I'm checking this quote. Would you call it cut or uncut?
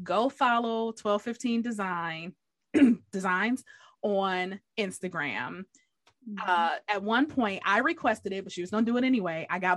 uncut